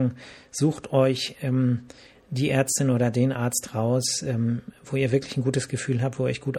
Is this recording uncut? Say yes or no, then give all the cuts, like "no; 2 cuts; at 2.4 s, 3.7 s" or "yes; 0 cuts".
yes; 0 cuts